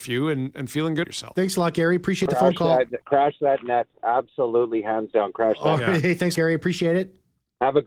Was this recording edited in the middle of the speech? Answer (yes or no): yes